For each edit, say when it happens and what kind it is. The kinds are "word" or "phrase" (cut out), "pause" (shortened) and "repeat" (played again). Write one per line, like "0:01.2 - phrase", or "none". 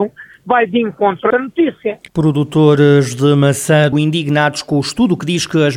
0:01.3 - word
0:02.1 - pause
0:03.9 - phrase